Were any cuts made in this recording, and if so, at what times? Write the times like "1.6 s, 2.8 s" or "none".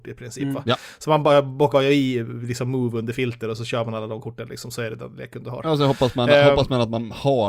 1.7 s